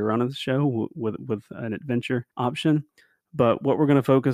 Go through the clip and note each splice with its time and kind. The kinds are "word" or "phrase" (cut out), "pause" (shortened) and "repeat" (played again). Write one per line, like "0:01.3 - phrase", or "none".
0:02.3 - pause